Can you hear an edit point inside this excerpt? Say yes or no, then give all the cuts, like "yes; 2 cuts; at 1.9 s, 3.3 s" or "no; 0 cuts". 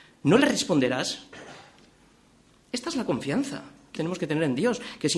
yes; 1 cut; at 3.9 s